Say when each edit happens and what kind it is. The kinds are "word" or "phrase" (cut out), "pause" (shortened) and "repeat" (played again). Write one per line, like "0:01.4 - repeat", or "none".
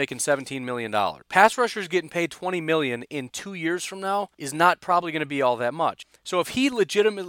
0:01.2 - pause
0:04.3 - pause